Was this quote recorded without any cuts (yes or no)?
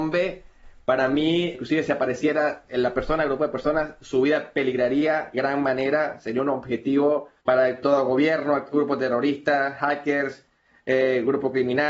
no